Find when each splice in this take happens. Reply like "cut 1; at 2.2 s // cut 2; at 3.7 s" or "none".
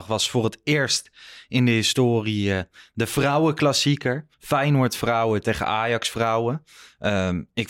cut 1; at 4.3 s